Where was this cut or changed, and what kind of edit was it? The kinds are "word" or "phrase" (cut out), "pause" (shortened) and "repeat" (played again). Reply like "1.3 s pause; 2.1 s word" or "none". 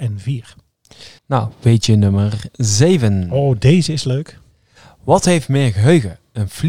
1.2 s pause